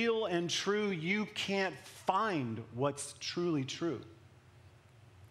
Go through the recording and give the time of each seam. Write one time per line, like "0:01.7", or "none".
none